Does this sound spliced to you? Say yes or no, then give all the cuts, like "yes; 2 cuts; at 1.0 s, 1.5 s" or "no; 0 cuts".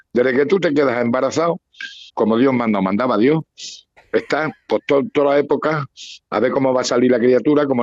yes; 2 cuts; at 2.1 s, 4.0 s